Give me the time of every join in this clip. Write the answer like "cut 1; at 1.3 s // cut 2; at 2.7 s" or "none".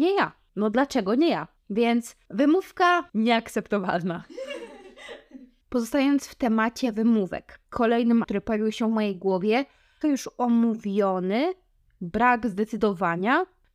cut 1; at 3.1 s // cut 2; at 8.2 s // cut 3; at 10.0 s